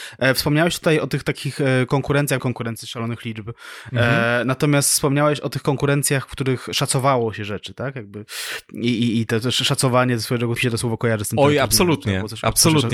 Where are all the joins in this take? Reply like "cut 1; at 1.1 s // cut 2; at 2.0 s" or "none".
cut 1; at 2.4 s // cut 2; at 10.6 s